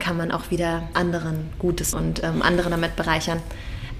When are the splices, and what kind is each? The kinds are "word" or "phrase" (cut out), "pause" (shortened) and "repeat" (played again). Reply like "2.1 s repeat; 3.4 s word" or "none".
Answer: 0.9 s word; 1.9 s word